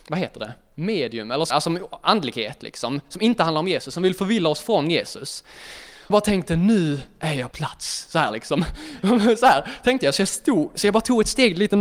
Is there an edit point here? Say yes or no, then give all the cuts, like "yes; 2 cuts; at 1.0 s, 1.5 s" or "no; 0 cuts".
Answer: yes; 3 cuts; at 1.5 s, 6.1 s, 7.5 s